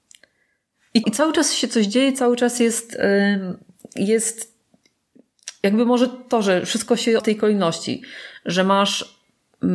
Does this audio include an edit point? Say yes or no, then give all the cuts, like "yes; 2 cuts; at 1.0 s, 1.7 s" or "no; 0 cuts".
yes; 2 cuts; at 1.0 s, 7.2 s